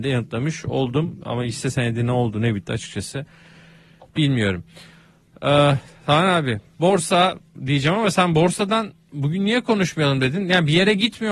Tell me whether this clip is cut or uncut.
uncut